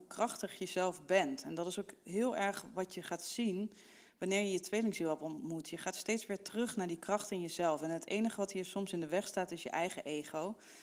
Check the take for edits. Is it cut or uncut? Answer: uncut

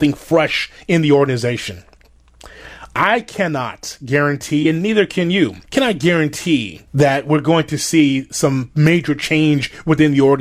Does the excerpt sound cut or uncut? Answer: cut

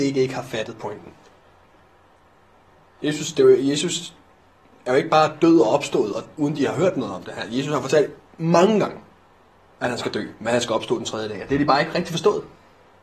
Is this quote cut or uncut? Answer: uncut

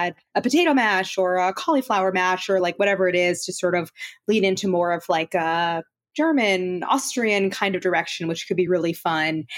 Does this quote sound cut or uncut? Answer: uncut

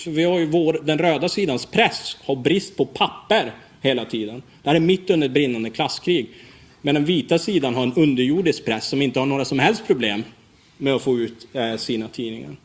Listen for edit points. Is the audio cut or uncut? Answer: uncut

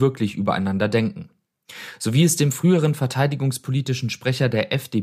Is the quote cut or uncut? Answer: uncut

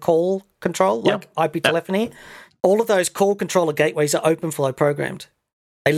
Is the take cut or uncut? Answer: uncut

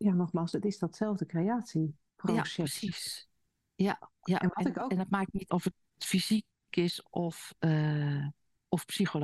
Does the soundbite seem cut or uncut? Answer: cut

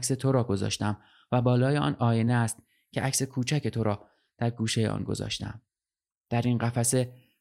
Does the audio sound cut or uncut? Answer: uncut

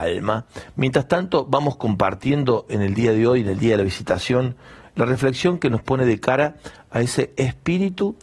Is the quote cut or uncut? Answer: uncut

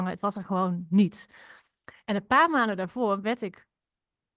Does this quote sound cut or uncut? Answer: cut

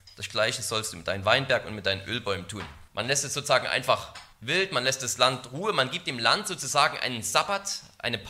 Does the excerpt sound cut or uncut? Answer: cut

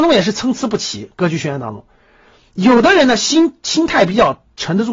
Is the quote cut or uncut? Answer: uncut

